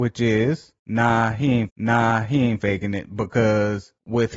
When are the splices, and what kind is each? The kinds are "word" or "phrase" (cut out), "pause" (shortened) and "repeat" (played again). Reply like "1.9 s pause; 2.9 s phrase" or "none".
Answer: 1.7 s repeat